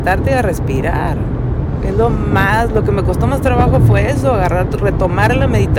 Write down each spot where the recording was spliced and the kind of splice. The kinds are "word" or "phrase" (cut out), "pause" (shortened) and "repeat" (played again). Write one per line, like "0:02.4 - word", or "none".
none